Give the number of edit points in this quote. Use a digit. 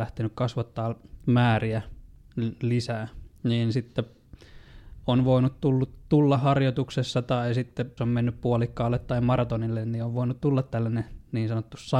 1